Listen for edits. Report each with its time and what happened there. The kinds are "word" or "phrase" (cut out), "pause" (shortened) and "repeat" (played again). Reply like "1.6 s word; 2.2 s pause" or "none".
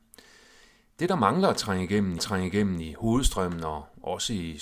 2.2 s repeat